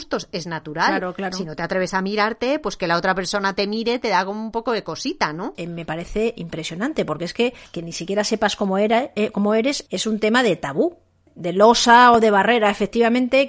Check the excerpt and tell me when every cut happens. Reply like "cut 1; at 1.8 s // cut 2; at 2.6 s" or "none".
none